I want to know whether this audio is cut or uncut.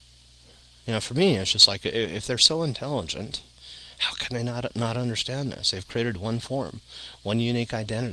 uncut